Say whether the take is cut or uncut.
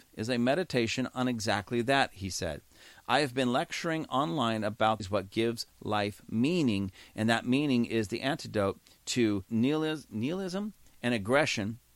cut